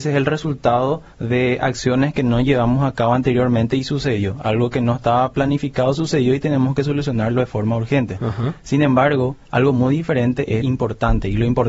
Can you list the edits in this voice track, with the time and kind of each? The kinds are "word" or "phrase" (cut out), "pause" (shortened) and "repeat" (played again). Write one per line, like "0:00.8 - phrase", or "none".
0:01.1 - pause
0:09.4 - pause
0:10.6 - phrase